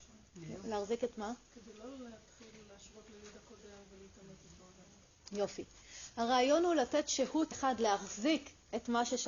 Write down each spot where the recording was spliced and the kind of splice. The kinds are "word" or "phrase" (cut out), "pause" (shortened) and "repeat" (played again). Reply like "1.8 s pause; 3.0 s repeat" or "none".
1.5 s pause; 7.5 s word